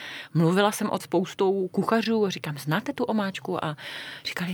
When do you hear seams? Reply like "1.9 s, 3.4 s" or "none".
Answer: 1.0 s